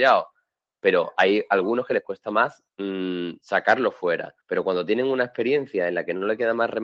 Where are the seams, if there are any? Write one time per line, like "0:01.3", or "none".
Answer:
0:02.7
0:04.4